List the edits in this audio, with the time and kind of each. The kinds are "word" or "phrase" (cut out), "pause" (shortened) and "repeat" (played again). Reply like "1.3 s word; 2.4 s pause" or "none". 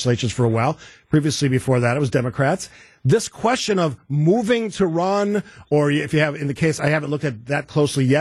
none